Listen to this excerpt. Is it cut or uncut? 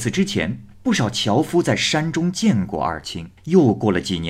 cut